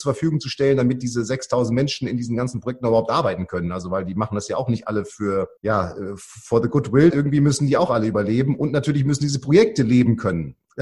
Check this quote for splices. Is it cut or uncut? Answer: cut